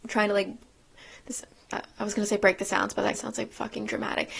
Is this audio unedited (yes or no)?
no